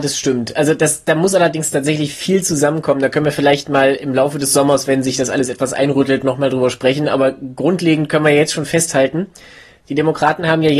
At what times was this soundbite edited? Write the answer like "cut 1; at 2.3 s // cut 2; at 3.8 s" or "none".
none